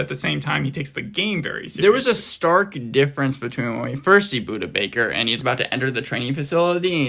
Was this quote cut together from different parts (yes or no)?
no